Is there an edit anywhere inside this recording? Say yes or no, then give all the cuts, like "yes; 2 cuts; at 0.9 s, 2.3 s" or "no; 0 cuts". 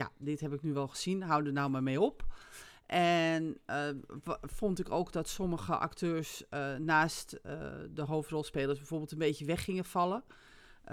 no; 0 cuts